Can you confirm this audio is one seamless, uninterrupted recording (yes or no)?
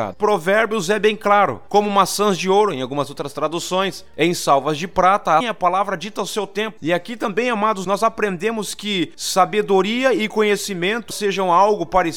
no